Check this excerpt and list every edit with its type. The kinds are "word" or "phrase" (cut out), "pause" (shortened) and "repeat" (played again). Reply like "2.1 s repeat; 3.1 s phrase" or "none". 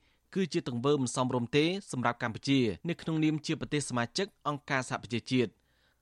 2.8 s pause